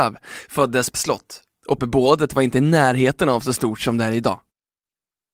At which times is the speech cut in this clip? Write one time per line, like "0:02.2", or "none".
0:00.9
0:01.8